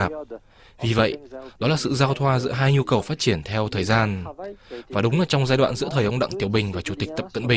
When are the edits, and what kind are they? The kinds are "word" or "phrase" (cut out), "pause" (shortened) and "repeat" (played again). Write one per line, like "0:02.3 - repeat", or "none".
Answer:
none